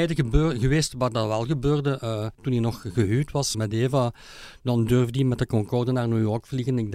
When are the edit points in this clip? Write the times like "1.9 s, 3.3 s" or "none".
2.3 s, 3.5 s